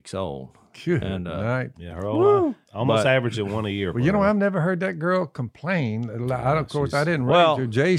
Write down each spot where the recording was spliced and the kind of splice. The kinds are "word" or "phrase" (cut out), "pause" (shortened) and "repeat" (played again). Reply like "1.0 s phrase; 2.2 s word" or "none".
none